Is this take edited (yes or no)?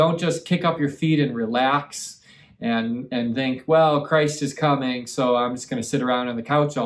no